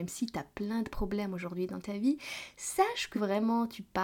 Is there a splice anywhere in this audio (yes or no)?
yes